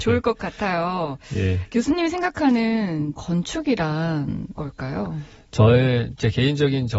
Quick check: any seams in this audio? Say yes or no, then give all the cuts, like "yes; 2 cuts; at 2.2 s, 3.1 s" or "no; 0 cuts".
yes; 2 cuts; at 3.2 s, 4.6 s